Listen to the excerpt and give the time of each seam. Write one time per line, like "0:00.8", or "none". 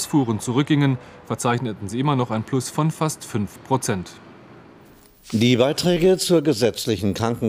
none